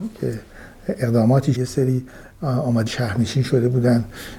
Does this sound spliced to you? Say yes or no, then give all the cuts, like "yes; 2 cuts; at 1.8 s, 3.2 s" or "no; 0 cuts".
yes; 2 cuts; at 1.5 s, 2.9 s